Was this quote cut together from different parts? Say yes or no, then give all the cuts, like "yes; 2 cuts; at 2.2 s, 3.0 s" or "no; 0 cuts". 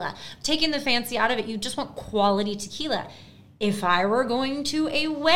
no; 0 cuts